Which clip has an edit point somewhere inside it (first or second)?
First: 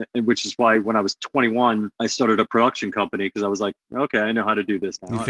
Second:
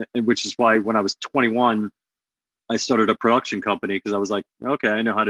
first